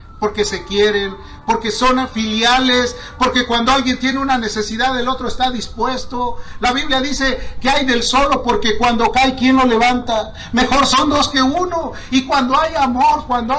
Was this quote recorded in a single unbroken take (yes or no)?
yes